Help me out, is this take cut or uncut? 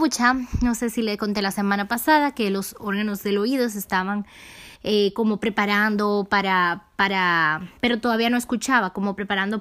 cut